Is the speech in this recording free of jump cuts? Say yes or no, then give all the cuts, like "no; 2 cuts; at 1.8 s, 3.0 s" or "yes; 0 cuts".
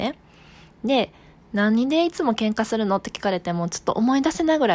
yes; 0 cuts